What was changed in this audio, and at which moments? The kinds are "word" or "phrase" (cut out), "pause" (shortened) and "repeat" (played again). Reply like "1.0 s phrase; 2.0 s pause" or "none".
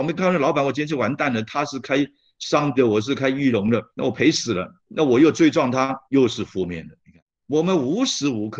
2.8 s word; 3.9 s pause; 4.8 s pause; 6.0 s pause